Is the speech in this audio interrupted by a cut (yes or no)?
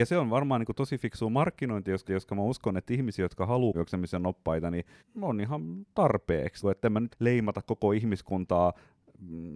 yes